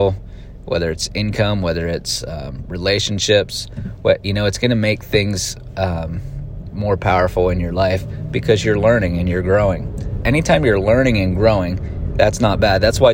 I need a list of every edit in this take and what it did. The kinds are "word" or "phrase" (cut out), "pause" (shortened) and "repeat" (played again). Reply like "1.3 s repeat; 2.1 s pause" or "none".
10.2 s word